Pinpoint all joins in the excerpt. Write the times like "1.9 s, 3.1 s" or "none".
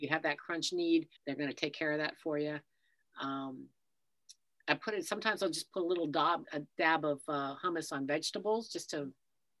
1.2 s, 6.4 s